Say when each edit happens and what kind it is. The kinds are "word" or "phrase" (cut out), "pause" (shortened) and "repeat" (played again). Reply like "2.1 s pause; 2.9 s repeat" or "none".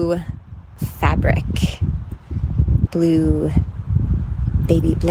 2.9 s word

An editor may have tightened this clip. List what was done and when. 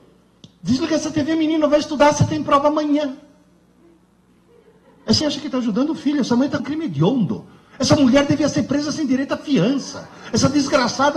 5.2 s word; 6.6 s word

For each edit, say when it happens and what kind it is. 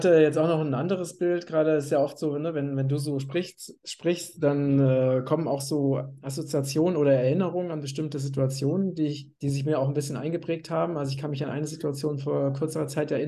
9.4 s pause

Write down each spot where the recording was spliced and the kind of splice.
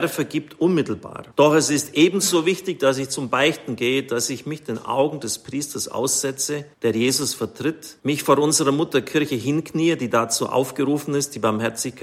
1.3 s pause; 6.7 s pause; 8.0 s pause

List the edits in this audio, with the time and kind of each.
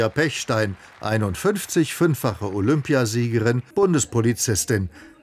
3.7 s pause

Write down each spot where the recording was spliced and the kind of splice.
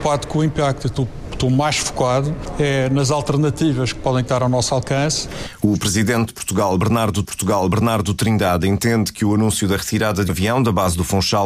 6.3 s phrase; 7.2 s repeat; 10.3 s word

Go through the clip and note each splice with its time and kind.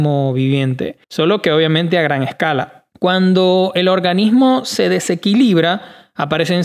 1.0 s pause; 2.9 s pause

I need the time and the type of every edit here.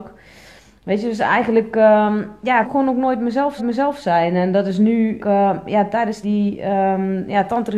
2.6 s word; 3.6 s repeat; 5.2 s phrase; 6.2 s word

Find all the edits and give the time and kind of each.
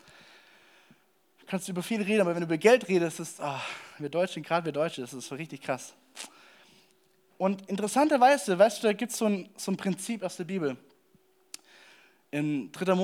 none

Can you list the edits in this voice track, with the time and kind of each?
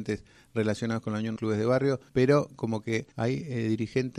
1.4 s phrase; 2.1 s pause; 3.1 s pause

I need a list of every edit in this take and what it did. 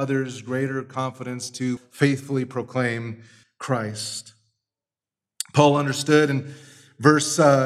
1.8 s word; 3.4 s word

